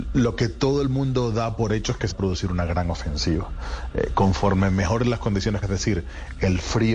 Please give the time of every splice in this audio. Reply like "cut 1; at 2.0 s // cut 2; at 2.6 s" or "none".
cut 1; at 2.1 s // cut 2; at 5.6 s

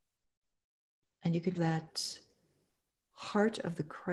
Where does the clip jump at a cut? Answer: cut 1; at 1.6 s

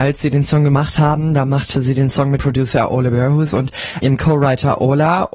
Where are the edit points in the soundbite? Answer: cut 1; at 2.4 s // cut 2; at 4.0 s

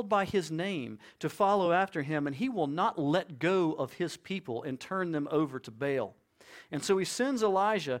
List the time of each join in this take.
none

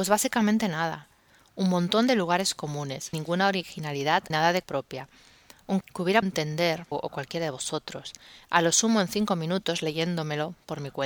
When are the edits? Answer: cut 1; at 3.1 s // cut 2; at 4.3 s // cut 3; at 4.6 s // cut 4; at 5.8 s // cut 5; at 6.2 s // cut 6; at 6.9 s

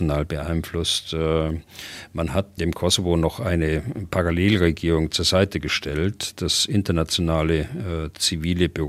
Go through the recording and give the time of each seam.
none

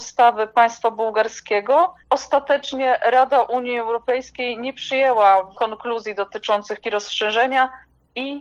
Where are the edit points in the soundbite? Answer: cut 1; at 2.0 s // cut 2; at 5.5 s // cut 3; at 6.8 s

